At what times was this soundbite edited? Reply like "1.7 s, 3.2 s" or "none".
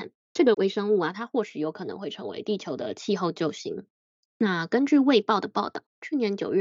none